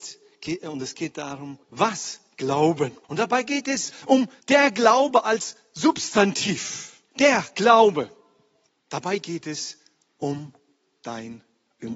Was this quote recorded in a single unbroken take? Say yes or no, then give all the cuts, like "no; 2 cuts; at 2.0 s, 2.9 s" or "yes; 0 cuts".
no; 5 cuts; at 1.6 s, 3.0 s, 4.4 s, 7.1 s, 8.7 s